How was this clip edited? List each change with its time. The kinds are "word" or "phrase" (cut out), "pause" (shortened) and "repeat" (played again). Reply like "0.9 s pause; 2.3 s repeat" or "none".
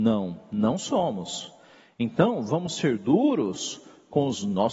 none